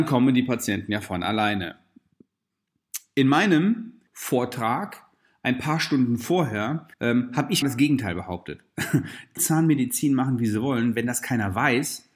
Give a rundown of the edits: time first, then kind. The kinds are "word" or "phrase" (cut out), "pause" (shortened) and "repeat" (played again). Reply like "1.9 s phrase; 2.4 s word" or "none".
4.1 s pause; 6.9 s pause; 7.6 s word; 9.4 s phrase